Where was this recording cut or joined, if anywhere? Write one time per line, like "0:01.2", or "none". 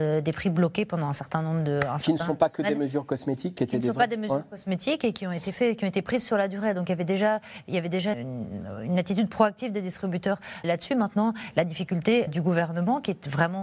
0:08.1
0:10.6
0:12.3